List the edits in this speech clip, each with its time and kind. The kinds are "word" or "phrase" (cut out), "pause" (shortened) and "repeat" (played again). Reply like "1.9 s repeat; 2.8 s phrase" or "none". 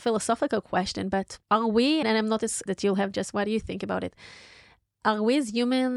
1.4 s pause; 2.0 s word; 2.7 s word; 3.1 s phrase